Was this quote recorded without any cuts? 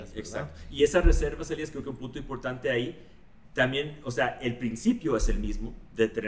yes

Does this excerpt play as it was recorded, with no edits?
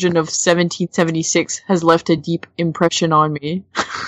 yes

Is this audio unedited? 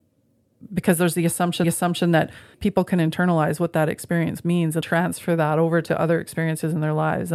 no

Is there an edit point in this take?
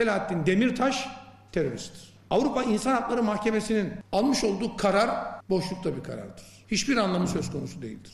no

